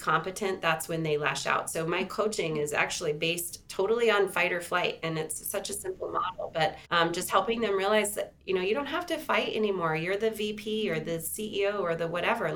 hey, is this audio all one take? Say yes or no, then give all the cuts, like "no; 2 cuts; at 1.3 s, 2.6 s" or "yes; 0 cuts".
no; 1 cut; at 6.8 s